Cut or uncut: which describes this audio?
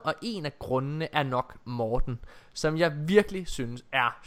uncut